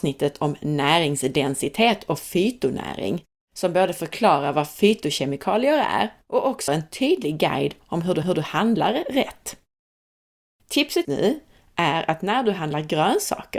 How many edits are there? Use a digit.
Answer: 5